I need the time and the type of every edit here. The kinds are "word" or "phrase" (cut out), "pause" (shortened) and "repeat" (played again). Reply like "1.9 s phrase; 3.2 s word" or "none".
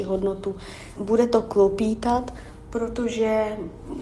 1.0 s word